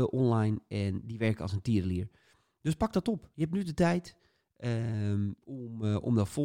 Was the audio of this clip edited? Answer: no; 0 cuts

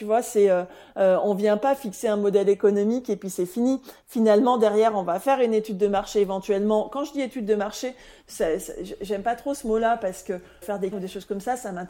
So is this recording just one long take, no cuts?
no; 2 cuts; at 10.6 s, 10.9 s

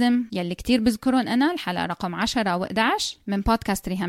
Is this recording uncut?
yes; 0 cuts

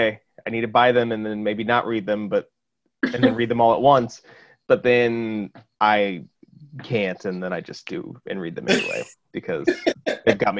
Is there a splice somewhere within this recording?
no; 0 cuts

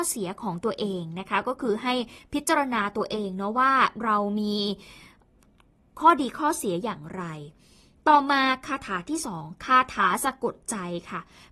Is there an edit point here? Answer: no; 0 cuts

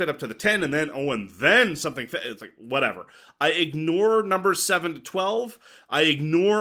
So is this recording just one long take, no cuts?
yes; 0 cuts

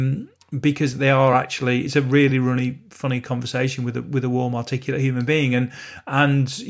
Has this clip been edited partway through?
no; 0 cuts

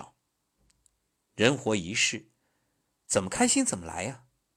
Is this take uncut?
yes; 0 cuts

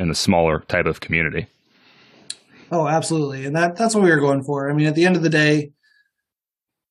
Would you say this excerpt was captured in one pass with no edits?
yes; 0 cuts

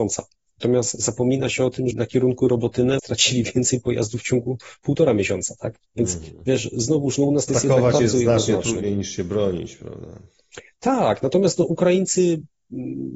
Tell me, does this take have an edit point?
yes; 4 cuts; at 1.9 s, 3.0 s, 5.8 s, 7.5 s

